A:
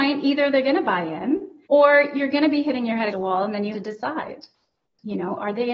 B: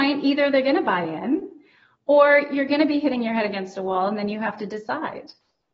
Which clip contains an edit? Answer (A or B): A